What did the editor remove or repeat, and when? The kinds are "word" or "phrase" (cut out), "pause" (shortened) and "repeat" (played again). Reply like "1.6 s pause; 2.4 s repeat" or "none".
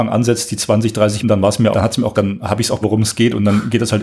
1.2 s word; 1.7 s word; 2.1 s word; 2.8 s word